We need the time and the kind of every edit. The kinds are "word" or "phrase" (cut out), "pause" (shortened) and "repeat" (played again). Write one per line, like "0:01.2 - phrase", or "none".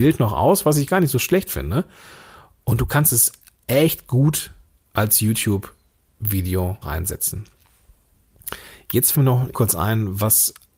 0:06.8 - word
0:09.1 - word
0:09.5 - word